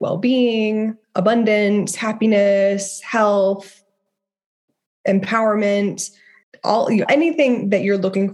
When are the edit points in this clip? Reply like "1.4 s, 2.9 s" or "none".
1.0 s, 6.4 s, 7.1 s